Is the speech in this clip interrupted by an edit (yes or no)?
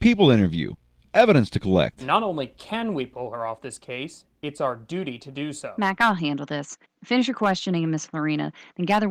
yes